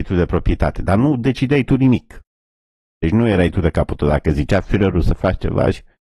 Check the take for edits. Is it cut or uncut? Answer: uncut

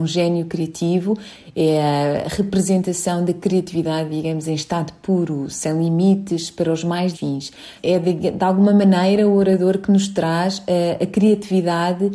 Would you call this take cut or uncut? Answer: cut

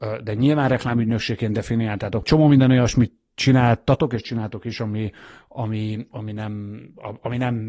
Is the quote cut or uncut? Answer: cut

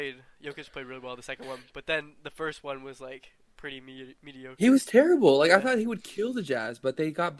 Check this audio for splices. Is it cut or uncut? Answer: uncut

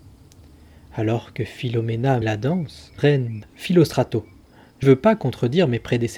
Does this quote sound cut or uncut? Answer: cut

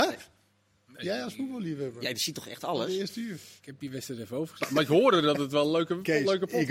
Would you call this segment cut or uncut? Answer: cut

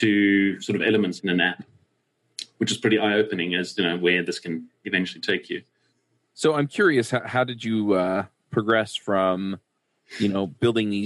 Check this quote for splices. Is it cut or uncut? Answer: uncut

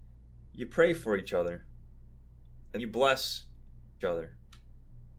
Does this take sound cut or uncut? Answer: cut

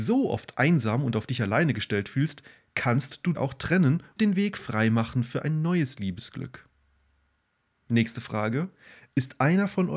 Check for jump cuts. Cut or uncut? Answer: cut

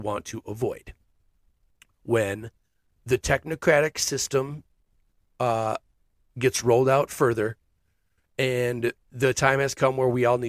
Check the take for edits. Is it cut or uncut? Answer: cut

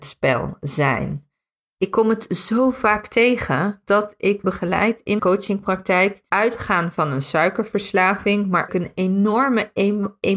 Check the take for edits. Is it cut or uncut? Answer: cut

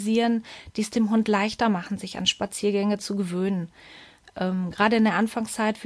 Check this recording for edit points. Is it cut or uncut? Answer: uncut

